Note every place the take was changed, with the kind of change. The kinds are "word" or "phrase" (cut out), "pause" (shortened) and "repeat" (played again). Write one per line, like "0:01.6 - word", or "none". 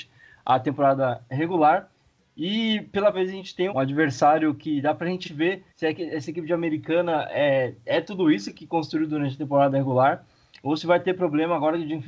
0:03.1 - word
0:03.7 - word
0:05.2 - word
0:05.7 - pause